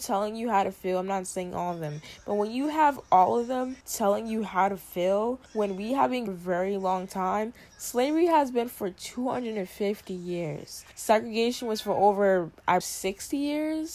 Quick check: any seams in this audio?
yes; 5 cuts; at 3.8 s, 5.5 s, 6.3 s, 10.9 s, 12.8 s

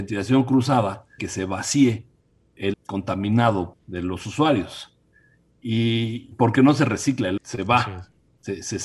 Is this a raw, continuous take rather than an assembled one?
no; 5 cuts; at 1.2 s, 2.7 s, 3.7 s, 6.3 s, 7.4 s

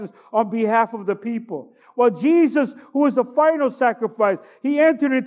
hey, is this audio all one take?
yes; 0 cuts

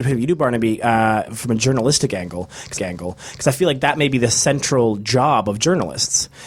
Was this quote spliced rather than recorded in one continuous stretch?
yes; 2 cuts; at 1.3 s, 2.8 s

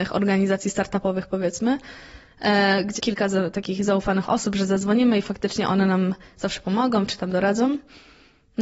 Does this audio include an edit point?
yes; 1 cut; at 3.0 s

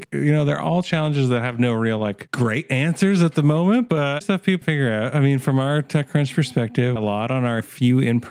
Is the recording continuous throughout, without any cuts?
no; 3 cuts; at 4.2 s, 4.6 s, 7.0 s

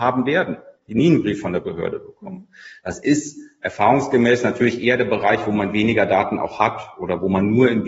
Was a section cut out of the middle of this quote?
no; 0 cuts

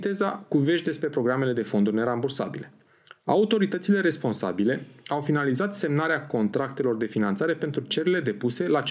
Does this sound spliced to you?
no; 0 cuts

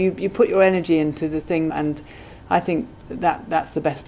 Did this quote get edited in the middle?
yes; 1 cut; at 1.7 s

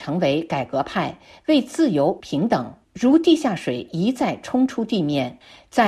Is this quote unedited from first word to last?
no; 1 cut; at 2.2 s

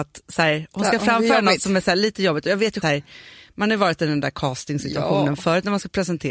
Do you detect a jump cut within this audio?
yes; 1 cut; at 2.8 s

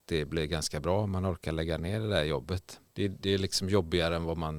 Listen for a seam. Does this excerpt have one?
yes; 1 cut; at 2.9 s

